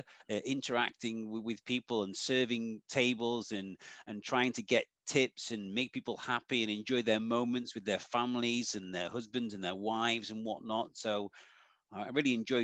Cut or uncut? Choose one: uncut